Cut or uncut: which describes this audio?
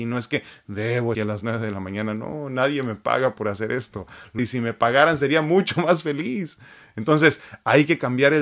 cut